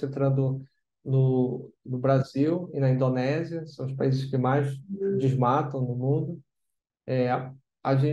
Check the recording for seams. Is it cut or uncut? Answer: uncut